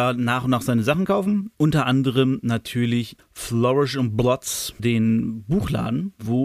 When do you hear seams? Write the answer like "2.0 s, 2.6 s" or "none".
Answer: 3.2 s, 4.8 s